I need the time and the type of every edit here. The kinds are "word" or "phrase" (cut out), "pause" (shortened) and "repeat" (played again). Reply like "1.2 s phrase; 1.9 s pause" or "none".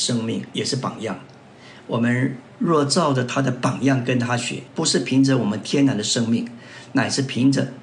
4.7 s pause